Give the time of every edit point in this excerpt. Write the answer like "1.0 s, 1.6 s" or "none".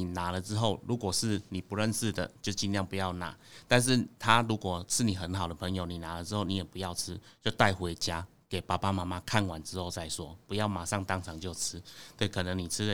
none